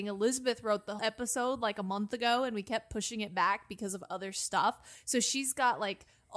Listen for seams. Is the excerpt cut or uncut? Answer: cut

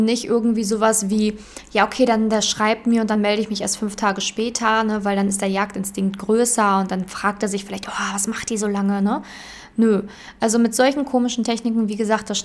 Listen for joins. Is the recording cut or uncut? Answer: uncut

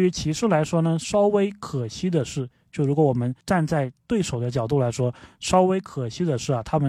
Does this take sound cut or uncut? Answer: cut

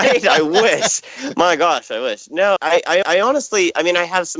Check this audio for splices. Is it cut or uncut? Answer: cut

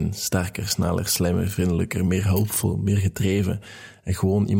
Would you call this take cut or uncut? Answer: uncut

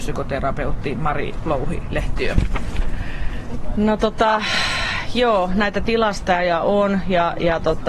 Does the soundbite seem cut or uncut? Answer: uncut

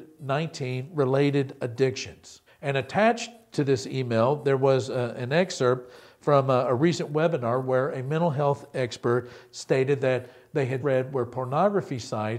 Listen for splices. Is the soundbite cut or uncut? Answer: cut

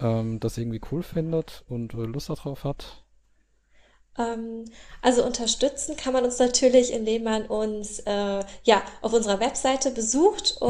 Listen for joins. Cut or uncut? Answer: uncut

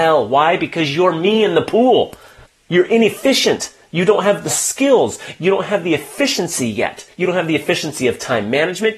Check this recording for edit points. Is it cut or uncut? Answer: cut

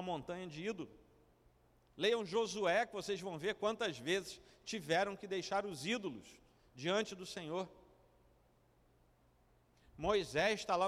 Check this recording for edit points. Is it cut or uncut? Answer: uncut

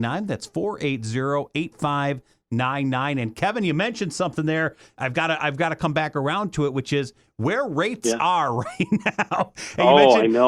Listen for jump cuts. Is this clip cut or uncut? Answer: uncut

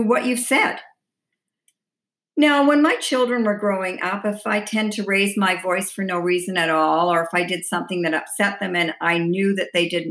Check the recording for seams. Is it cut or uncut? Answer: uncut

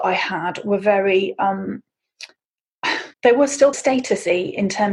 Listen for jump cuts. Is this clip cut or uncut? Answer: cut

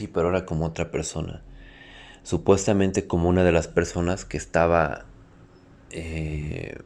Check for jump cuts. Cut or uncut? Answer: uncut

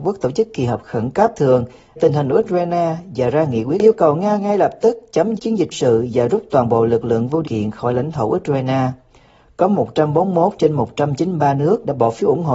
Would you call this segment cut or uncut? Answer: cut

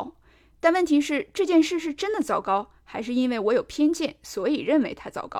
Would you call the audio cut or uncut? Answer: uncut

